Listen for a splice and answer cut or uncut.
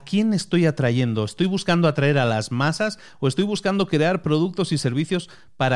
uncut